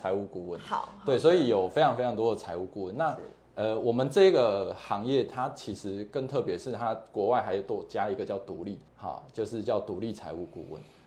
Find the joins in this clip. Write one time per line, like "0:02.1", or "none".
0:08.9